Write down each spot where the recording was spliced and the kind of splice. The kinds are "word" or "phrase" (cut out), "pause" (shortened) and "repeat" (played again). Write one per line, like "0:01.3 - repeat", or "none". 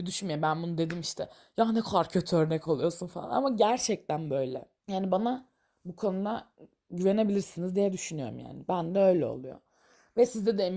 0:04.8 - pause